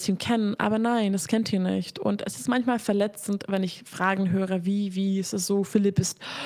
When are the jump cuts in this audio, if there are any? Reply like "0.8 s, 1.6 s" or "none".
none